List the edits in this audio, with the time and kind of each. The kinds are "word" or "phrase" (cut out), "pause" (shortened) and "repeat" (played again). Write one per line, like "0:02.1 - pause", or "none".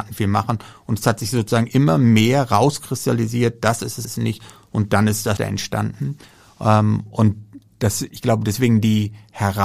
0:04.0 - phrase
0:05.4 - word